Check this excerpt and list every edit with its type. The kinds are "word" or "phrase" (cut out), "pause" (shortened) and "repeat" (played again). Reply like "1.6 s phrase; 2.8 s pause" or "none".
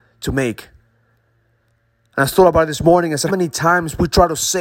3.3 s word